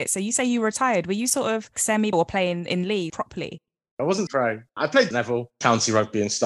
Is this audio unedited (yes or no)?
no